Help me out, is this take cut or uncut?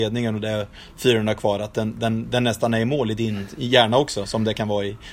uncut